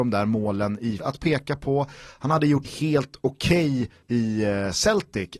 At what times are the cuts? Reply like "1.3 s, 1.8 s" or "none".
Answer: 1.0 s, 2.6 s, 4.0 s